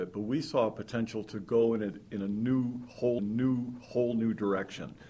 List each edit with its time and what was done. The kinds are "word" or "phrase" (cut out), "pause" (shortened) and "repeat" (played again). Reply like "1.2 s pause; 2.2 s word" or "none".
3.2 s repeat